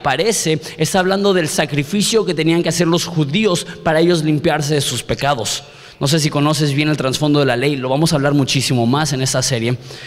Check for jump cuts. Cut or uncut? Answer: uncut